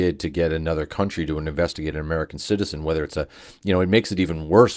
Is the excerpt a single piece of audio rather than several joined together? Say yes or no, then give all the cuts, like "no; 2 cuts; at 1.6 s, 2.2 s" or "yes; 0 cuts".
yes; 0 cuts